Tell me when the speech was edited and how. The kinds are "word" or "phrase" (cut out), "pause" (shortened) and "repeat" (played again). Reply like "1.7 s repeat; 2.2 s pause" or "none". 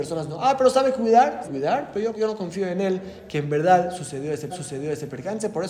1.4 s word; 2.1 s word; 4.5 s repeat